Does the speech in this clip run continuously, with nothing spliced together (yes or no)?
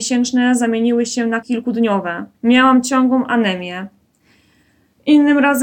no